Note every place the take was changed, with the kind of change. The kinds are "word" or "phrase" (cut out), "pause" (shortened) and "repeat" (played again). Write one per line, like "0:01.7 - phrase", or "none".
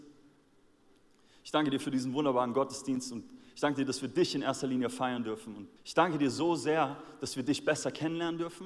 0:05.8 - pause

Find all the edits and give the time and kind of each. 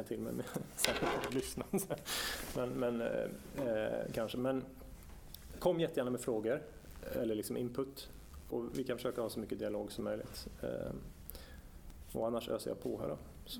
0:08.5 - word

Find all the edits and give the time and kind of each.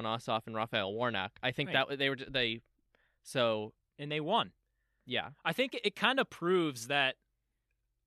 none

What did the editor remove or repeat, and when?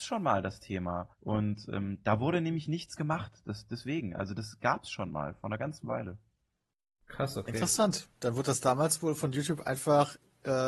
0:01.1 - pause

